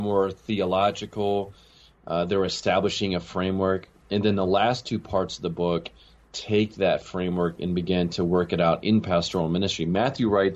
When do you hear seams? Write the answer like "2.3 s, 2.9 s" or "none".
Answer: none